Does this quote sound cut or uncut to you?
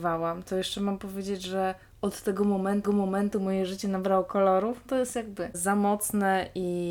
cut